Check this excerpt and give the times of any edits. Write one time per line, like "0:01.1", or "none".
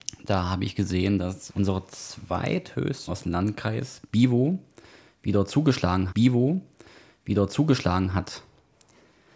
0:01.5
0:03.1
0:06.1